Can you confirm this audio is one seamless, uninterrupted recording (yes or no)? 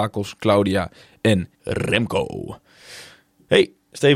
no